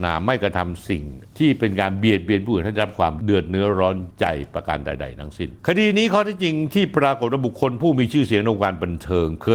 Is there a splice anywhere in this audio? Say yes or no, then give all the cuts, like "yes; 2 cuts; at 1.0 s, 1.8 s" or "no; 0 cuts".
yes; 1 cut; at 5.6 s